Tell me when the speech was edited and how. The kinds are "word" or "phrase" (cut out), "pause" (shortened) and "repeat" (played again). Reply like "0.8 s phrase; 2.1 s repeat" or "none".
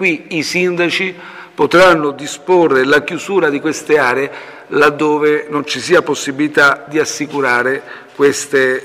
none